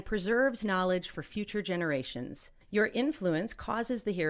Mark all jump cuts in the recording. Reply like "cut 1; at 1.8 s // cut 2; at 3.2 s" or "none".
cut 1; at 2.6 s